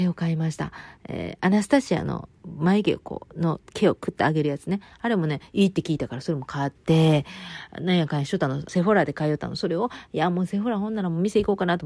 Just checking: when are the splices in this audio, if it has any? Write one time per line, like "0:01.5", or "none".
0:06.8
0:08.7